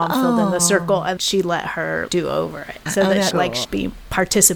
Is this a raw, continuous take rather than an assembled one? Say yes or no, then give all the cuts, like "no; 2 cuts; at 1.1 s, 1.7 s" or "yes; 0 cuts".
no; 5 cuts; at 1.2 s, 2.1 s, 2.9 s, 3.3 s, 3.6 s